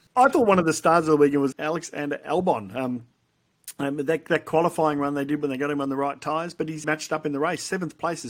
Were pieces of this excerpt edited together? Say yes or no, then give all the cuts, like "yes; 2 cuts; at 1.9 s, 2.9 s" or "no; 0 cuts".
yes; 2 cuts; at 1.5 s, 6.8 s